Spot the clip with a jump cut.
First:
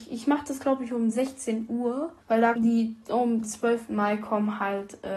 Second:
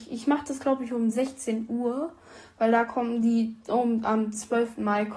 first; 3 cuts; at 2.2 s, 2.6 s, 3.4 s

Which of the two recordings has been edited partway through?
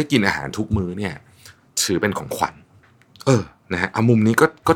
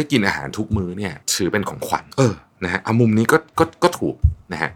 second; 2 cuts; at 1.2 s, 2.1 s

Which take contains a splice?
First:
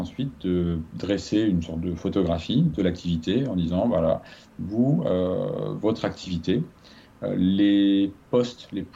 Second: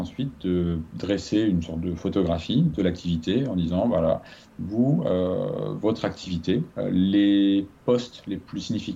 second; 1 cut; at 6.7 s

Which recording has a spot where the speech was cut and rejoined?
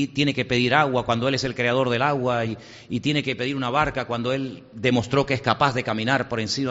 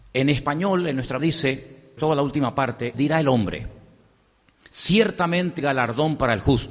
second; 4 cuts; at 1.2 s, 2.0 s, 2.9 s, 5.6 s

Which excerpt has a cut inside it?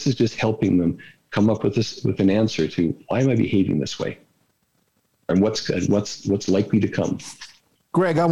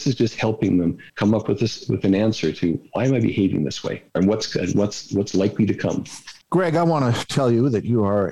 second; 3 cuts; at 1.1 s, 4.1 s, 6.4 s

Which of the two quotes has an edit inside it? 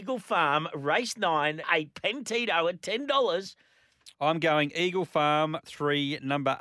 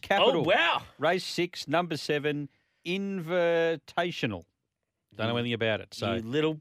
first; 3 cuts; at 1.6 s, 4.1 s, 5.6 s

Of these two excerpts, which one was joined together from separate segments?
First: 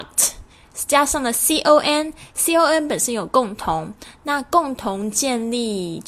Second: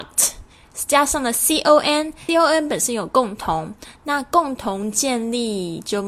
second; 1 cut; at 2.3 s

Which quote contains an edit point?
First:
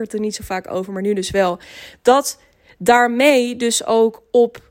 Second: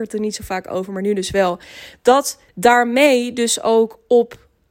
second; 1 cut; at 2.5 s

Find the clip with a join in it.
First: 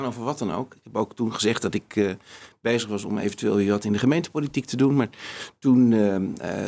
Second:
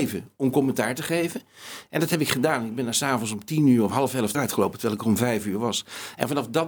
second; 1 cut; at 4.3 s

